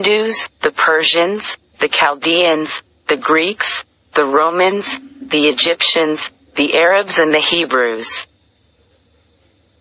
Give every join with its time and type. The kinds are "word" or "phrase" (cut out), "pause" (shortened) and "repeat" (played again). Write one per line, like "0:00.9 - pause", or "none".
none